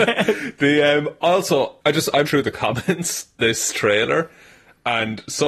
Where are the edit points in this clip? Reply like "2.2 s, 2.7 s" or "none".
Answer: 1.8 s, 2.2 s, 3.4 s